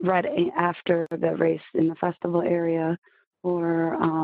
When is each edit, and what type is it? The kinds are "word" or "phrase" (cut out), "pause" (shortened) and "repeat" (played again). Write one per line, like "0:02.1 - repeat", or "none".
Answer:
none